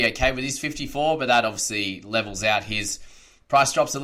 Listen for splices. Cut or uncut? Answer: uncut